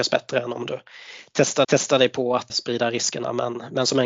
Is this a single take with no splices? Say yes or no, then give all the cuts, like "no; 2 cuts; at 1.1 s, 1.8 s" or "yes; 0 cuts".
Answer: no; 2 cuts; at 1.6 s, 2.5 s